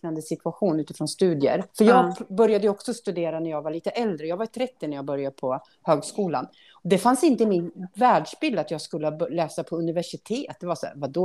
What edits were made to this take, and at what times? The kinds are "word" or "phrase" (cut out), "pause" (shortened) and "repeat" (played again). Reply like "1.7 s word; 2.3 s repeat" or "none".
1.7 s pause